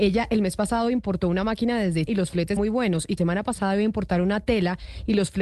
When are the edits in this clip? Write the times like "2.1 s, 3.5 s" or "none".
2.1 s, 2.6 s, 3.2 s

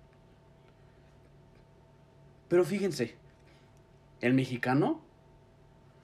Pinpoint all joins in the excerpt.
none

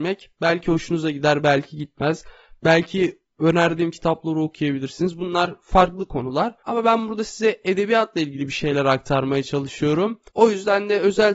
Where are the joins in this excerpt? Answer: 6.6 s, 10.3 s

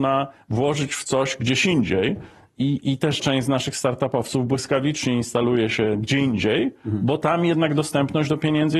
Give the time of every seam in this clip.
3.2 s

